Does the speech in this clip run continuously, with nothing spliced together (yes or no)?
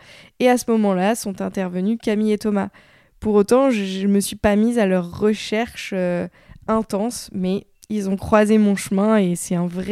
yes